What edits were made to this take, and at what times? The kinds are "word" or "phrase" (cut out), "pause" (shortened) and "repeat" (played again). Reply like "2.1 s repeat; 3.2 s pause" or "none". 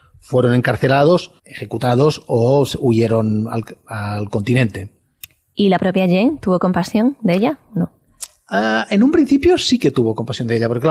1.4 s pause